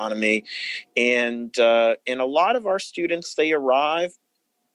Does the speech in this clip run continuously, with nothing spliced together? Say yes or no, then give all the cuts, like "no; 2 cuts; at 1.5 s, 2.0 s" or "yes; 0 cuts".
yes; 0 cuts